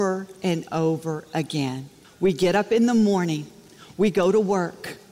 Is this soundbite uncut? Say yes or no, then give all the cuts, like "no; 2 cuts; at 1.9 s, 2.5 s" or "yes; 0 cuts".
no; 1 cut; at 2.0 s